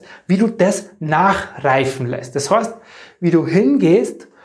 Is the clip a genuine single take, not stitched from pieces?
yes; 0 cuts

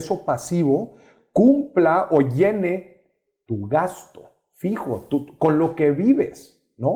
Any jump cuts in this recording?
no; 0 cuts

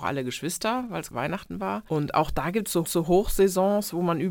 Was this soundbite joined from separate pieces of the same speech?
yes; 2 cuts; at 1.1 s, 2.8 s

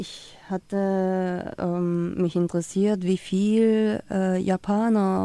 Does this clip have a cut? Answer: no; 0 cuts

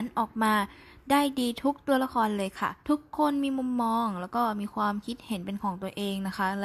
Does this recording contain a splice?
yes; 1 cut; at 2.8 s

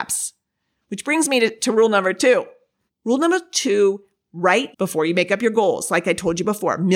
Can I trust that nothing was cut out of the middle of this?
no; 2 cuts; at 2.9 s, 4.7 s

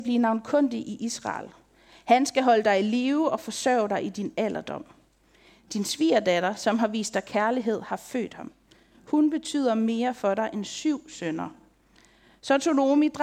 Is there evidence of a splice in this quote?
no; 0 cuts

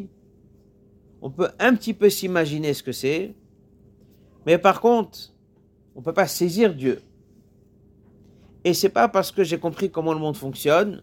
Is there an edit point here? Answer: no; 0 cuts

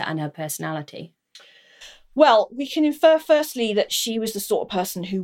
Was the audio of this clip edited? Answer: no; 0 cuts

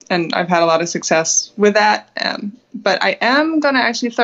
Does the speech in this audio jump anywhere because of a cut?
no; 0 cuts

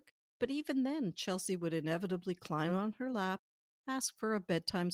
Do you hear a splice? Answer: no; 0 cuts

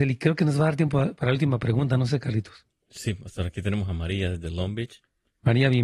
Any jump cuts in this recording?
no; 0 cuts

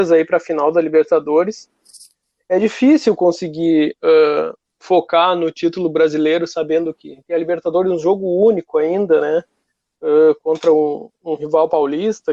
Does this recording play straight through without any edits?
no; 1 cut; at 7.2 s

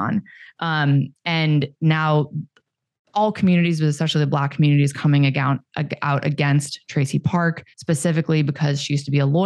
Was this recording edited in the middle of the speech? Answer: yes; 1 cut; at 7.7 s

